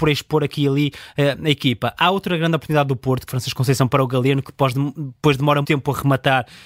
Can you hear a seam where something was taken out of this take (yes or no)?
yes